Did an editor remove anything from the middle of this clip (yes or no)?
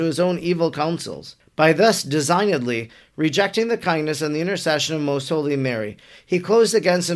no